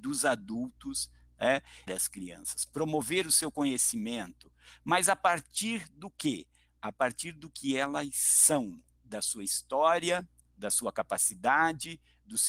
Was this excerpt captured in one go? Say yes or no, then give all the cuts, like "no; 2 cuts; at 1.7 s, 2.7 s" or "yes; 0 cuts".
no; 1 cut; at 1.9 s